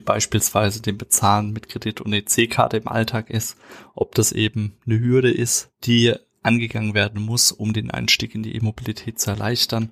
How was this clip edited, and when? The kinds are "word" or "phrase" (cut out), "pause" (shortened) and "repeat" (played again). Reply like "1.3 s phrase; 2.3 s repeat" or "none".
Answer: 5.7 s pause